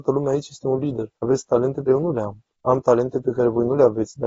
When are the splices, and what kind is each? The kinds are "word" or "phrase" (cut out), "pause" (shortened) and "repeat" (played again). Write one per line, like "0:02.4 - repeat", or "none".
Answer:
0:01.2 - pause
0:01.9 - word
0:02.5 - pause

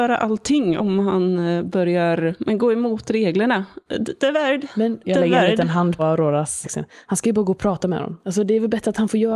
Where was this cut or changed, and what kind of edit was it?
0:05.0 - word
0:06.0 - word
0:06.6 - word

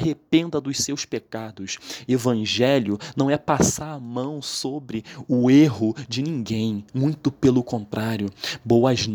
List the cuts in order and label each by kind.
none

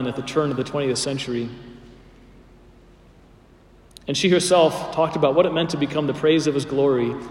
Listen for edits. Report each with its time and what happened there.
none

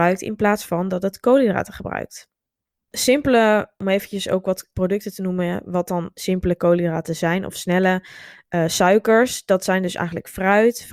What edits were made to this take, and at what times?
0:04.7 - word

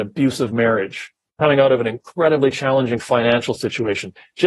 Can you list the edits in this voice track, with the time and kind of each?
none

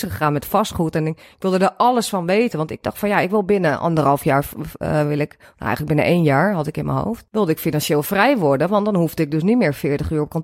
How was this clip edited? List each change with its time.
0:07.3 - pause

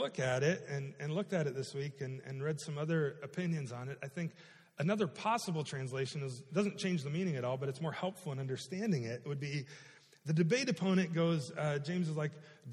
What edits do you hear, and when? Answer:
none

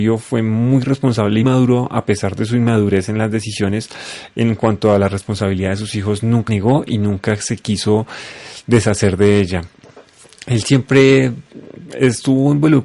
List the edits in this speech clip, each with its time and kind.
0:01.4 - word
0:06.5 - word

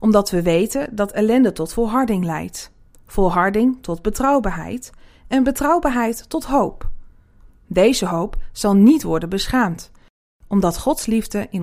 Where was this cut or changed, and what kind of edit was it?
none

